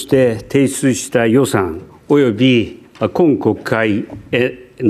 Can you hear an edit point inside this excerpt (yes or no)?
no